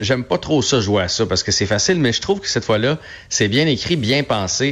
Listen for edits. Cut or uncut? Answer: uncut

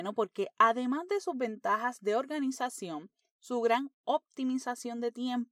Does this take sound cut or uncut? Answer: uncut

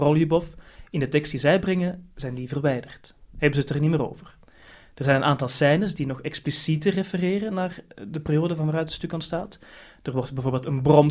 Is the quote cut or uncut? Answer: uncut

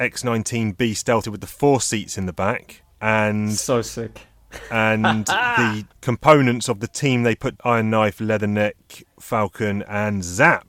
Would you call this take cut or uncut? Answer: cut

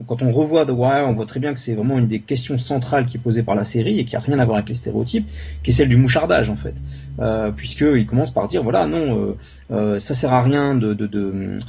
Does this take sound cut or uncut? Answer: uncut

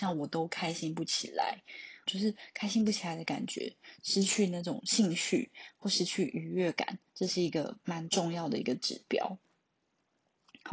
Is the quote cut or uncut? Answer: cut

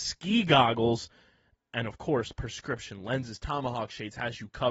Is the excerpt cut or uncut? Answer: uncut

